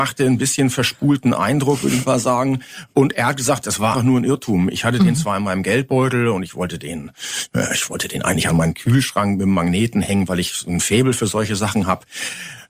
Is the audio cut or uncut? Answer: cut